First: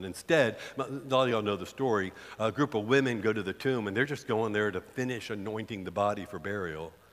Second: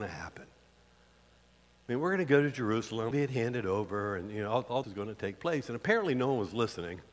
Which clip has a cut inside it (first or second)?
second